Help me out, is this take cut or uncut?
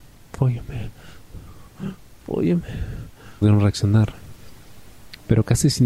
cut